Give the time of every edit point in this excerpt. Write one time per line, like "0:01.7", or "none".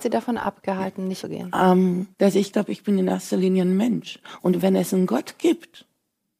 0:01.2
0:02.1
0:02.5